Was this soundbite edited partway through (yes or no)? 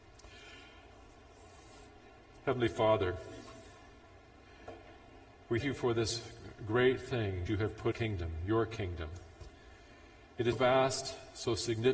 yes